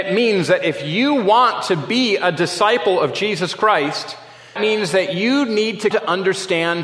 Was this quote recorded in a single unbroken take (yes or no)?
no